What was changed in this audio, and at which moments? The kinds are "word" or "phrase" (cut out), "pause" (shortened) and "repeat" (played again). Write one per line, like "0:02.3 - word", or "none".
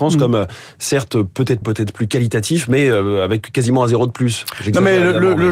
0:01.6 - phrase